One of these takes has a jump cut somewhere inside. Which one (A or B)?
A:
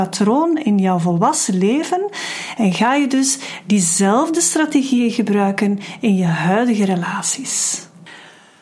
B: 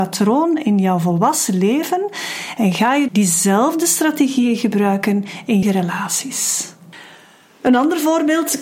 B